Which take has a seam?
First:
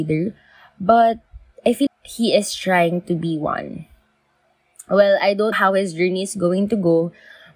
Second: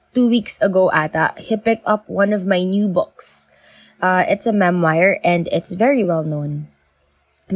first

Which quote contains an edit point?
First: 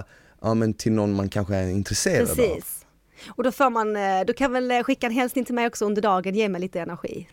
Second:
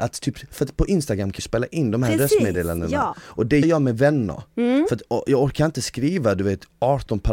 second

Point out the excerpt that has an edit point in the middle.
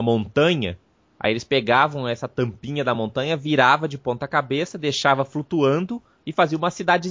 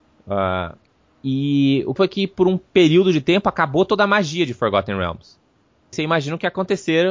second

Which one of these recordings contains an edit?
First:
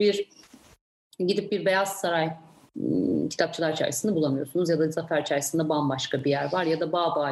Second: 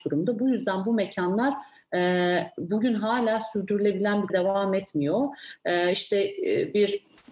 second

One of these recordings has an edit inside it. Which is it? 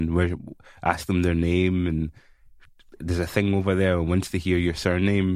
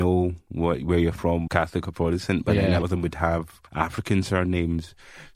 second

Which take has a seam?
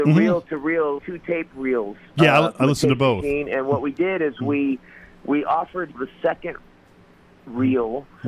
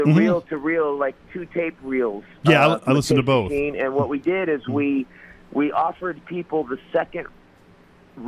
first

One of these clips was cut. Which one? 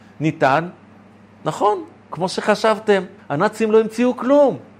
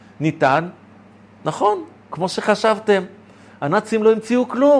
first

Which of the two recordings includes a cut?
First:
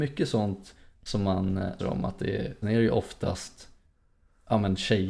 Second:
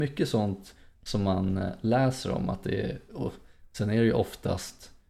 first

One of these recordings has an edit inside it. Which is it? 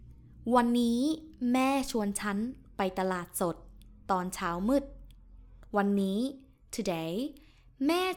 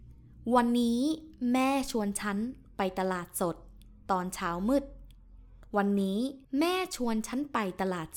second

